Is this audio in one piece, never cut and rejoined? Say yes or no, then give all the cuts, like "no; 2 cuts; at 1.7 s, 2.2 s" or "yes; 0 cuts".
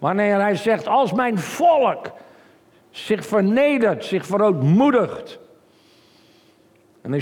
yes; 0 cuts